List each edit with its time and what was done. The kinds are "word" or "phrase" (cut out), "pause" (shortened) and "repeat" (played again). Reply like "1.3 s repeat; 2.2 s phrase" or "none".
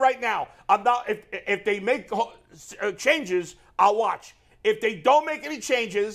none